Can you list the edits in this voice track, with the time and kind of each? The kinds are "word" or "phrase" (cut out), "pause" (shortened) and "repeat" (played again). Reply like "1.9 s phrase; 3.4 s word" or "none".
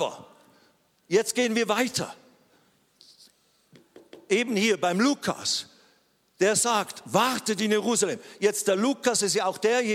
none